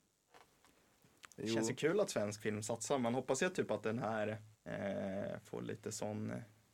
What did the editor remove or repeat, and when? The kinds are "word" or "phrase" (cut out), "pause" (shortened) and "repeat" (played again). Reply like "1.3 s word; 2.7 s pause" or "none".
4.5 s pause